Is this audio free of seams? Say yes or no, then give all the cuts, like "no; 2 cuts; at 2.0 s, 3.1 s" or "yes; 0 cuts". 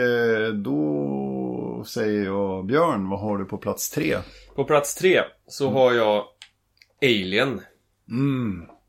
no; 1 cut; at 6.7 s